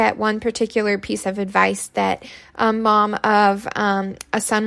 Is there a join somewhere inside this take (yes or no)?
no